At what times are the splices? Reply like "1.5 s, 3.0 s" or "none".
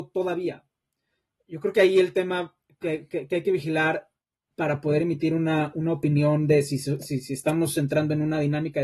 none